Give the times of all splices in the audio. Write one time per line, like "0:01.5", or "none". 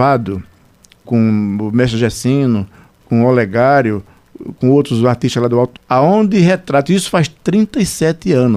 0:01.0
0:05.8